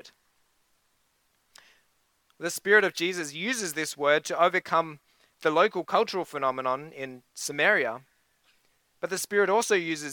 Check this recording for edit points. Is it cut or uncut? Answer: uncut